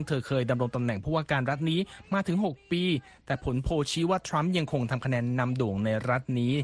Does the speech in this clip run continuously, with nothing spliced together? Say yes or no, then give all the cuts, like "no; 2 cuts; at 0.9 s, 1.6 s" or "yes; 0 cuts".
yes; 0 cuts